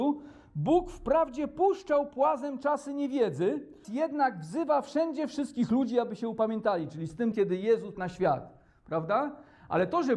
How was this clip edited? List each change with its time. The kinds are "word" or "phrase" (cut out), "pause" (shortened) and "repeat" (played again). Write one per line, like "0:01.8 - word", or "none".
0:03.8 - word
0:07.3 - word
0:07.9 - word